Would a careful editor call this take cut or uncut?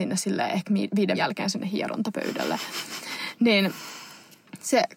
cut